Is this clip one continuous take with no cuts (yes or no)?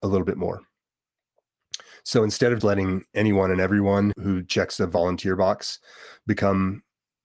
no